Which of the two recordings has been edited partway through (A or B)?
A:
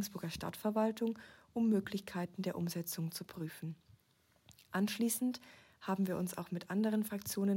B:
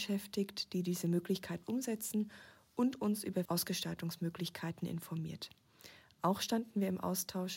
B